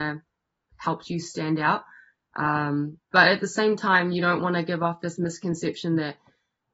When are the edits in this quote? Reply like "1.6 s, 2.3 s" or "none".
3.0 s